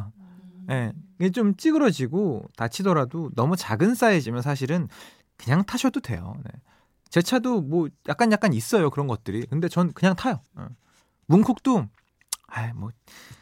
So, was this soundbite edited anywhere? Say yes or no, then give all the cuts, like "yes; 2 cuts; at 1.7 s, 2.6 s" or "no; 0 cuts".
yes; 1 cut; at 10.5 s